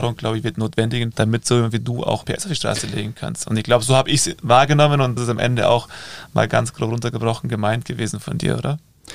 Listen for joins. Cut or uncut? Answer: cut